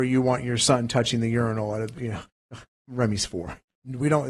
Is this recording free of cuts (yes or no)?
yes